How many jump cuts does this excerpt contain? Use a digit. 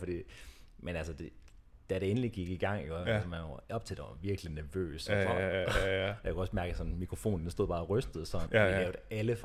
1